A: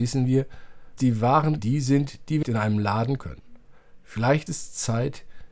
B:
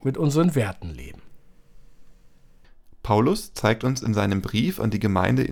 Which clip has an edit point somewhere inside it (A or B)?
A